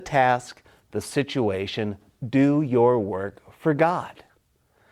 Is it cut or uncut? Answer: uncut